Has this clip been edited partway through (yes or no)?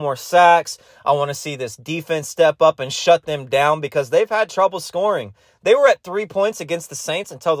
no